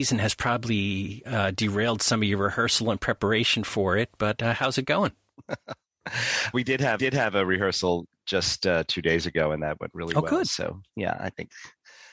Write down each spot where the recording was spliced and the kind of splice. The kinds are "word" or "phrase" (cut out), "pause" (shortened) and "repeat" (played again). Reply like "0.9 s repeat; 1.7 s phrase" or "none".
6.5 s word; 7.0 s repeat

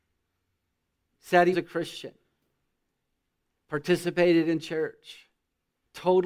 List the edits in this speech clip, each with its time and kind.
1.5 s word

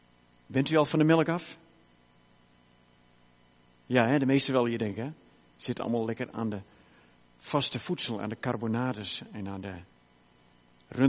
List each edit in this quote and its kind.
none

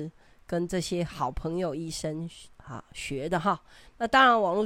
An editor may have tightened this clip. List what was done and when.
2.5 s pause

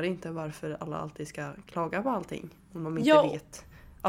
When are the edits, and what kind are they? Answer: none

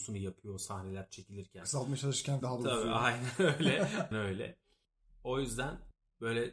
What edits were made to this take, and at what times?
2.4 s word; 4.1 s word

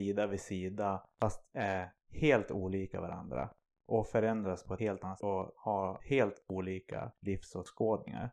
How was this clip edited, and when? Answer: 5.2 s word

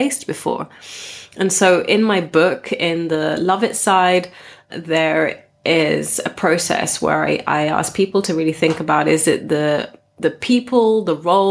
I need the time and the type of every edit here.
none

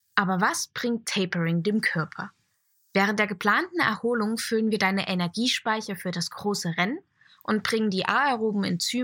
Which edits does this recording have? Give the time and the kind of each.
none

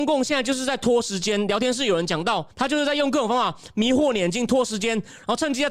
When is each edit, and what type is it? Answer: 2.5 s pause

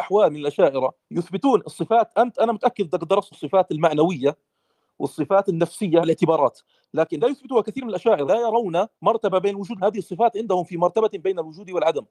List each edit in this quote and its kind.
1.0 s pause; 2.1 s word; 3.3 s word; 6.0 s phrase; 7.2 s word; 8.3 s word; 8.9 s pause; 9.8 s word

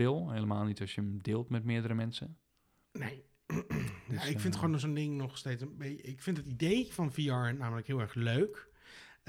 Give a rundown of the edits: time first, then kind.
none

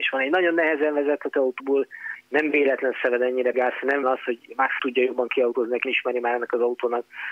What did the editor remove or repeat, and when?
1.6 s phrase; 3.5 s word; 4.0 s word; 4.8 s word; 5.8 s word

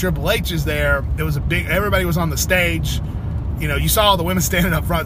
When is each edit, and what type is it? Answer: none

